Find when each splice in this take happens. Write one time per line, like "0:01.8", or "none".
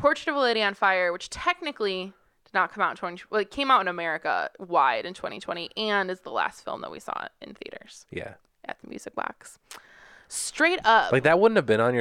none